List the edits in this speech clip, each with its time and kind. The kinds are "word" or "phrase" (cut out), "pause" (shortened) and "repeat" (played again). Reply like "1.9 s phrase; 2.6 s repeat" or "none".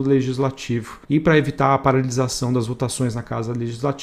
1.0 s pause

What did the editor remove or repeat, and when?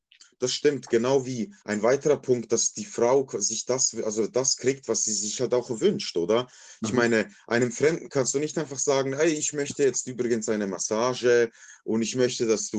1.6 s pause

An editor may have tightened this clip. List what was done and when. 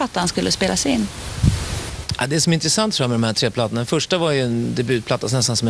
none

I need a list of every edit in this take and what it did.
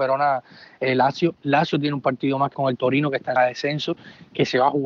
2.5 s word; 3.4 s word

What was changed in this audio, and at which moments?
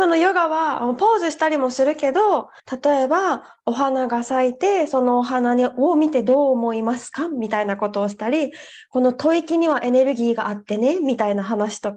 2.6 s pause

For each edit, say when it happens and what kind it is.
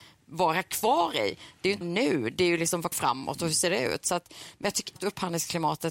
1.8 s word; 2.9 s word; 5.0 s word

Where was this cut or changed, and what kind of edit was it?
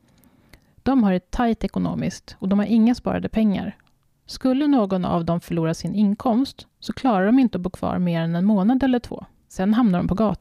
none

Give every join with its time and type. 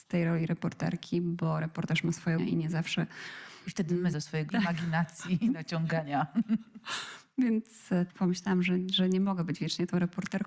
2.4 s word; 4.1 s word; 4.5 s word; 8.1 s word

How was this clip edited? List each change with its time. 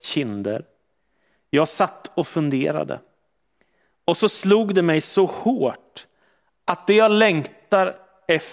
none

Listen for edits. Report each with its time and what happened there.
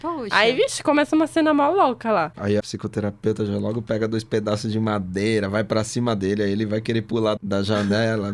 7.4 s word

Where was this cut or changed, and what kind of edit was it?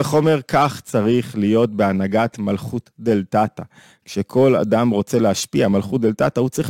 none

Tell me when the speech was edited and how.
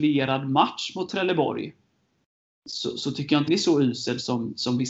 3.5 s word

